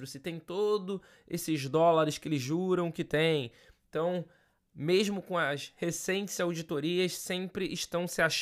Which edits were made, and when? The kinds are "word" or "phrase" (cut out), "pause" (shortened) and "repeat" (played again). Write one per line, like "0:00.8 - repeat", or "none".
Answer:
none